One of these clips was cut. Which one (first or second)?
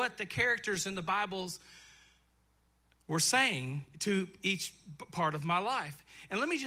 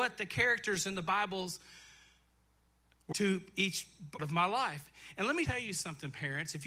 second